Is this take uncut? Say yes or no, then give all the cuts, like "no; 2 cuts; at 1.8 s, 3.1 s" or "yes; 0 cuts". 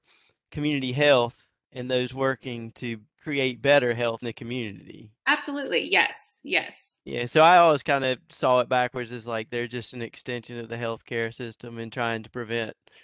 no; 2 cuts; at 3.1 s, 4.2 s